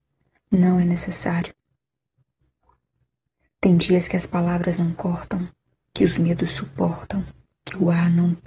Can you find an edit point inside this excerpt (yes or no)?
no